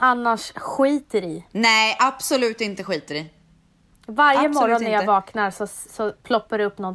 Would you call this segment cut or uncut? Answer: uncut